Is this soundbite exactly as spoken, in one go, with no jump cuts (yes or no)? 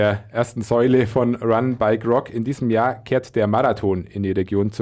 yes